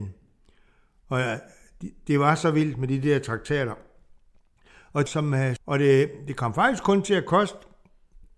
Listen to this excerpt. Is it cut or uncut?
cut